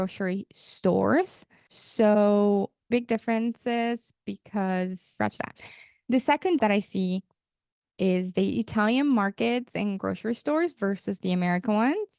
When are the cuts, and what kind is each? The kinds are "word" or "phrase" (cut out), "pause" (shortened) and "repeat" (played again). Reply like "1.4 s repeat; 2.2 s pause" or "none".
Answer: 2.9 s word; 6.6 s word